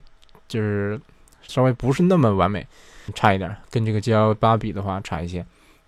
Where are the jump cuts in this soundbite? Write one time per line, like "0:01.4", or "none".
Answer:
0:01.5
0:03.1